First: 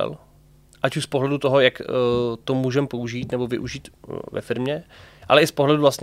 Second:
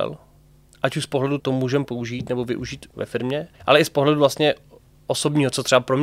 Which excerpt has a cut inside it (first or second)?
second